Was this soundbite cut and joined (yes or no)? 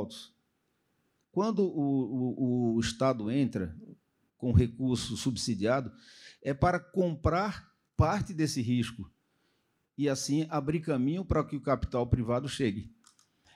no